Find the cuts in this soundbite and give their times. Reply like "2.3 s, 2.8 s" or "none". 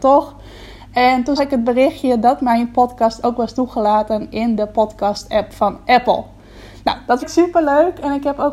1.4 s, 7.2 s

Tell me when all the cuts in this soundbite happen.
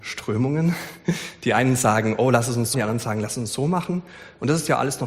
2.7 s

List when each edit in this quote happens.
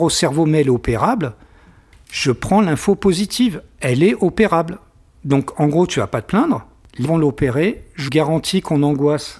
7.0 s, 8.1 s

